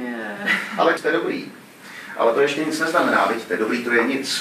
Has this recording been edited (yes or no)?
yes